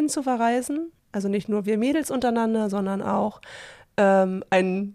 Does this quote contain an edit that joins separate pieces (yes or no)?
yes